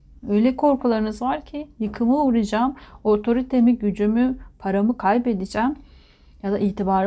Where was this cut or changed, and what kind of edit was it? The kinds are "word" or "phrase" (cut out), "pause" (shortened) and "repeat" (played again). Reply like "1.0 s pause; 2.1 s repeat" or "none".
none